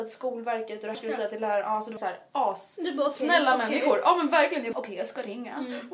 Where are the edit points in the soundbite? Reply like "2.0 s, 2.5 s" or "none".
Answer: 0.9 s, 2.0 s, 4.7 s